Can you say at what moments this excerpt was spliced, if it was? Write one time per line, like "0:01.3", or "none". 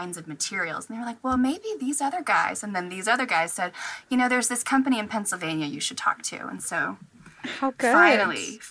none